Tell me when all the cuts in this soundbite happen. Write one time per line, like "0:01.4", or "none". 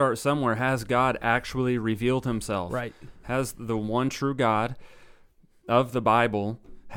none